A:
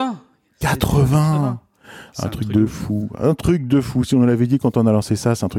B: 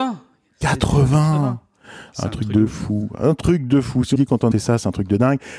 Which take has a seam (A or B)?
B